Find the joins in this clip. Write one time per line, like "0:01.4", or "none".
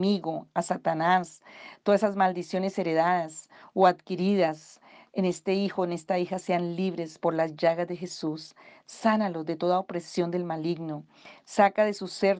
none